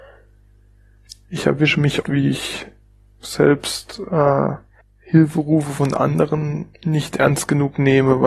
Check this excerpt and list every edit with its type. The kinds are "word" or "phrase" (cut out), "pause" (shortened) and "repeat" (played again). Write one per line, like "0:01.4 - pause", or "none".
0:02.0 - word
0:02.8 - pause
0:04.8 - pause
0:06.7 - pause